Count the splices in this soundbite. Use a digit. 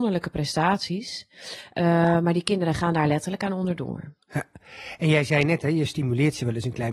1